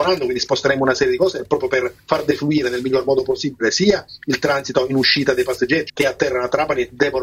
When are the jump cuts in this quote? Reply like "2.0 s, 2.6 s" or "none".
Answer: 5.9 s